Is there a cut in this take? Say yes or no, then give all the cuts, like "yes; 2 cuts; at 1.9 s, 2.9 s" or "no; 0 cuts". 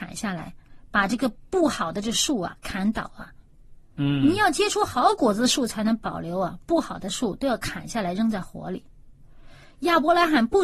no; 0 cuts